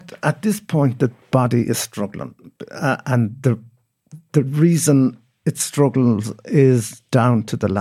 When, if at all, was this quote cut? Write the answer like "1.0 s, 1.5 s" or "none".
1.2 s